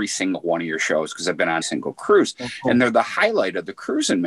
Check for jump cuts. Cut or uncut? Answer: cut